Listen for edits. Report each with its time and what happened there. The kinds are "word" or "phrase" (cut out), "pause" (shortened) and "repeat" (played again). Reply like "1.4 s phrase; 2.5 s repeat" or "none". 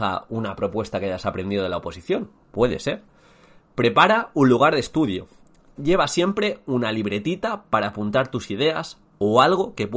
none